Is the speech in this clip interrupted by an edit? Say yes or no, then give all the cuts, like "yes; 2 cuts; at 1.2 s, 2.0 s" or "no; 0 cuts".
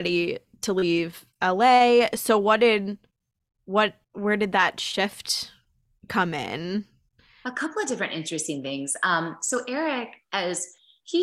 yes; 1 cut; at 4.0 s